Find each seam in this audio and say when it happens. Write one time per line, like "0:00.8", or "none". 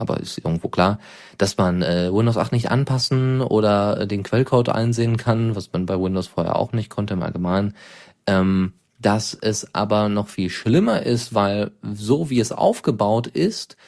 none